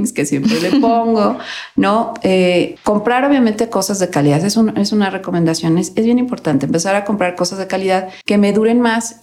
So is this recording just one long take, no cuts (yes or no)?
no